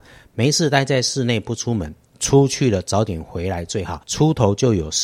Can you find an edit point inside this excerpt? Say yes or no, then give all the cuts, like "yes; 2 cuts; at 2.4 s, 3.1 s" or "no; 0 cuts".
yes; 1 cut; at 4.0 s